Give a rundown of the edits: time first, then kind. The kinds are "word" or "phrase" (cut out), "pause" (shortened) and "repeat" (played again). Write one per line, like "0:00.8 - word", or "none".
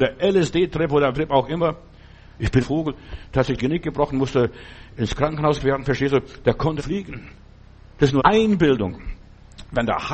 0:01.1 - word
0:02.6 - word
0:03.6 - word
0:05.6 - word
0:06.8 - word
0:08.2 - word